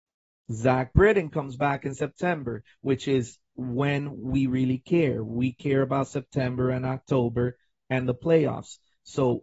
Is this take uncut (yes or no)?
yes